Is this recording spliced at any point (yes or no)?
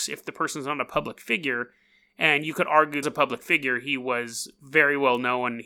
yes